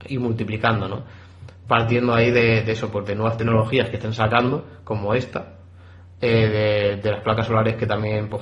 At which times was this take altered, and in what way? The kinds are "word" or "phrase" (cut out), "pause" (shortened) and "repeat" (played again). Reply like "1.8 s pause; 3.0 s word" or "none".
none